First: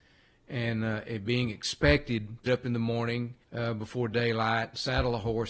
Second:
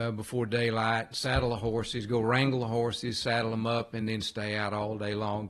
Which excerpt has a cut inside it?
first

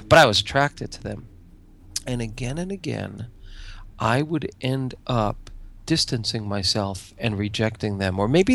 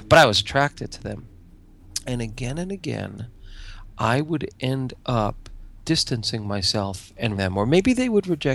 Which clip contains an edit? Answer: second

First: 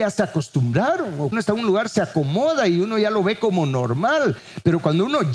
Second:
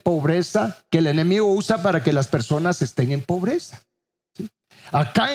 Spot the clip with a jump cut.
first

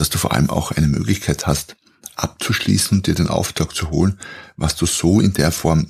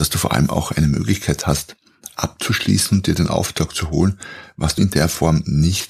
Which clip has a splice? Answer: second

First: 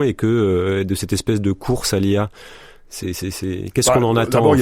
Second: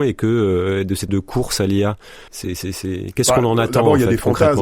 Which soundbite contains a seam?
second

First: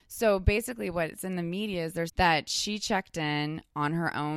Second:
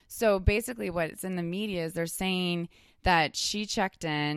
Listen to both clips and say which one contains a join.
first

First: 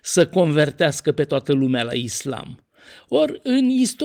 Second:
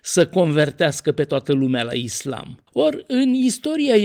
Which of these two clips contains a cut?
second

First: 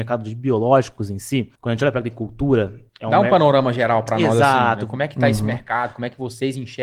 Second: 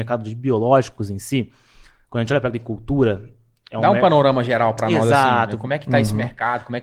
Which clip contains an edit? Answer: first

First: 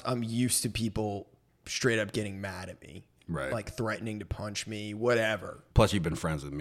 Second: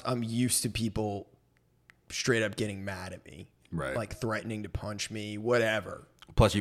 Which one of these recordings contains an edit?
first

